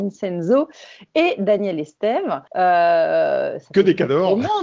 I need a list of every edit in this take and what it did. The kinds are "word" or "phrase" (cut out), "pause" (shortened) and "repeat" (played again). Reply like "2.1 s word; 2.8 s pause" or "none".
2.5 s pause